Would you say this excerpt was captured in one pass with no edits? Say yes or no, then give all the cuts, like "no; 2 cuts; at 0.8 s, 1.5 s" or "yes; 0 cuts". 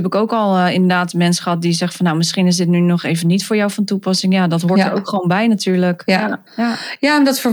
no; 1 cut; at 6.5 s